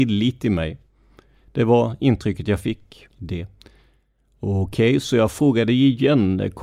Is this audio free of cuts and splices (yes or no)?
no